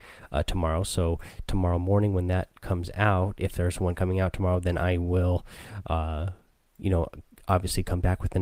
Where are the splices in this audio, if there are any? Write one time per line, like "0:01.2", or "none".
none